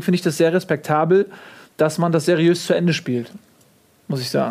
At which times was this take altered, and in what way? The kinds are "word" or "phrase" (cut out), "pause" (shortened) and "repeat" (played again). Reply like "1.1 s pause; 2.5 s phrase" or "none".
none